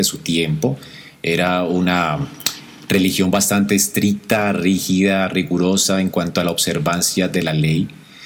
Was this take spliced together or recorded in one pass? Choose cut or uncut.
uncut